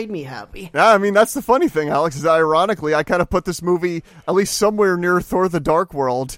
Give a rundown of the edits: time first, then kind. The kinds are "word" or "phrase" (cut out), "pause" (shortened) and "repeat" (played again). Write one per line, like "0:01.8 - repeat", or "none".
none